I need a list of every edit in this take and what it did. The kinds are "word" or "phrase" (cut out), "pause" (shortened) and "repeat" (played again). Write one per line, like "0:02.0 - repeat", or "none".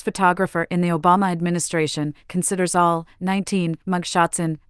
none

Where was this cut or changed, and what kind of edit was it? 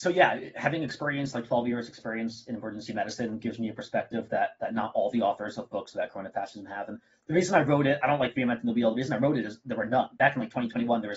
none

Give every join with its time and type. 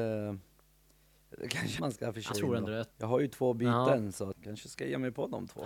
0:01.8 - word
0:02.3 - phrase
0:02.9 - pause
0:04.3 - word

